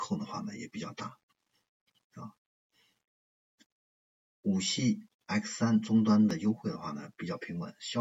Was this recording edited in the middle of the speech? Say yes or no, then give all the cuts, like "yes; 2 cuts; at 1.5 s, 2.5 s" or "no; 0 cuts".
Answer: no; 0 cuts